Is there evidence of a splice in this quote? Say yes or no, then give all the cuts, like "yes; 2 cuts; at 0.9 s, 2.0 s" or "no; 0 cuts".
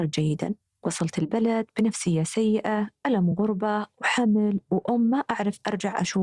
no; 0 cuts